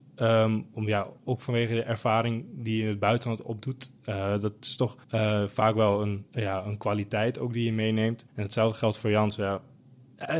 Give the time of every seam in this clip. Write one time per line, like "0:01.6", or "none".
0:05.0
0:06.3
0:08.3